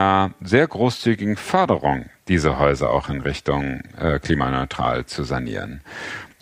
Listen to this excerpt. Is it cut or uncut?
cut